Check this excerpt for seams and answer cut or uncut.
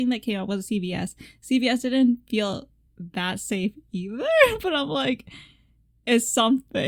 uncut